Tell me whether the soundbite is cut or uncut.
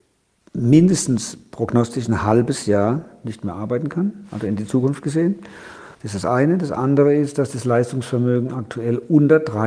cut